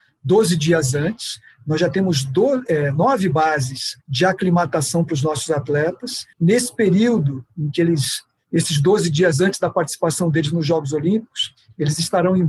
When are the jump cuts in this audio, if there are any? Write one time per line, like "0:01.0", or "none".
0:04.0
0:06.3
0:07.5